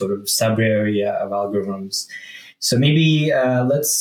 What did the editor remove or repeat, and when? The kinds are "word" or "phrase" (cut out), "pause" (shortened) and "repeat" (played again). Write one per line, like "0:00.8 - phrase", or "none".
none